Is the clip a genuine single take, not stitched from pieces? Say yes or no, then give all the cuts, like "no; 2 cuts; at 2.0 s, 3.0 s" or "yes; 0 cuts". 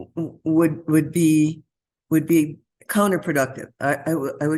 yes; 0 cuts